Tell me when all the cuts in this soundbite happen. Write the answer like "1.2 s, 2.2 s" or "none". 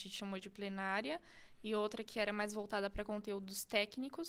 none